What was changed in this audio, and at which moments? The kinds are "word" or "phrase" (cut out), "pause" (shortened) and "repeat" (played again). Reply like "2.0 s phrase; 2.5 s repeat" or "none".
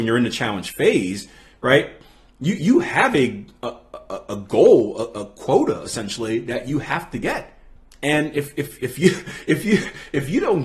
none